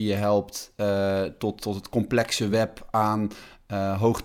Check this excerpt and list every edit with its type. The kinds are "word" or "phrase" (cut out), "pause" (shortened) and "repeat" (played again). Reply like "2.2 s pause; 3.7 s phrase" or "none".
none